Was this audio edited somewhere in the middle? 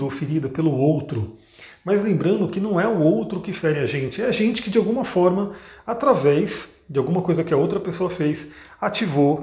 no; 0 cuts

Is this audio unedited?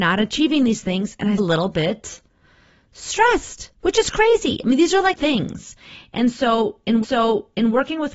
no; 4 cuts; at 1.4 s, 3.7 s, 5.1 s, 7.0 s

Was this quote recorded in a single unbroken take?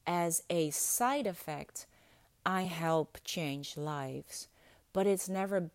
yes; 0 cuts

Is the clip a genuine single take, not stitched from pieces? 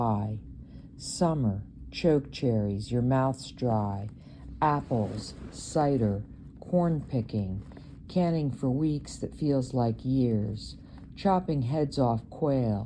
yes; 0 cuts

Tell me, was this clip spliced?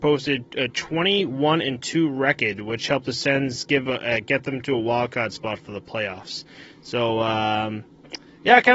no; 0 cuts

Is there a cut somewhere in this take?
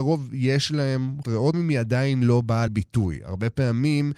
yes; 3 cuts; at 1.2 s, 1.5 s, 2.7 s

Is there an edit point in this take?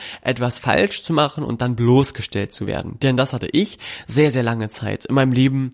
no; 0 cuts

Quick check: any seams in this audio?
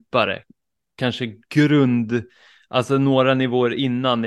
no; 0 cuts

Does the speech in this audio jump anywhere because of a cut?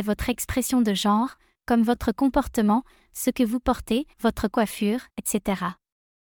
yes; 2 cuts; at 4.1 s, 5.1 s

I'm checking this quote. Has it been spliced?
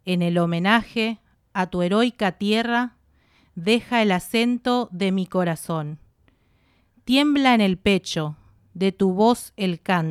no; 0 cuts

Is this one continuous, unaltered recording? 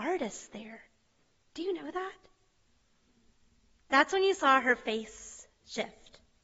yes; 0 cuts

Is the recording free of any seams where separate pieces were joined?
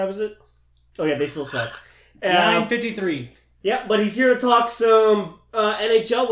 yes; 0 cuts

